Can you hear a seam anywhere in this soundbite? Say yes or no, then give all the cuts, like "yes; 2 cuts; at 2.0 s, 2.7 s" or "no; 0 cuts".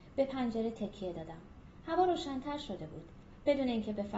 no; 0 cuts